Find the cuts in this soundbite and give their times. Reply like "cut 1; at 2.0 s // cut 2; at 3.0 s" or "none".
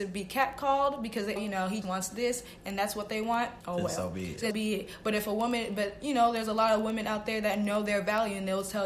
cut 1; at 1.4 s // cut 2; at 1.8 s // cut 3; at 3.6 s // cut 4; at 4.5 s